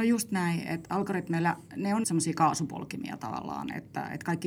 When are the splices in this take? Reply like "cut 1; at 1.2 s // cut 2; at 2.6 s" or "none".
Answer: cut 1; at 2.0 s